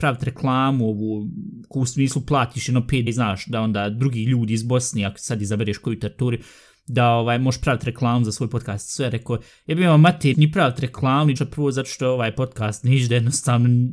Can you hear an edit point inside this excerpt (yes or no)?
yes